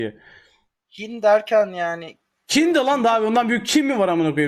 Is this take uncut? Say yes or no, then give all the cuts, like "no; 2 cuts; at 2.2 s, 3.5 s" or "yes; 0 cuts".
yes; 0 cuts